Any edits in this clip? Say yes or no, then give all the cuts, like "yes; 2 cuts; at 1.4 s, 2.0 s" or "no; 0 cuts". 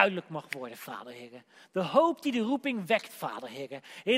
no; 0 cuts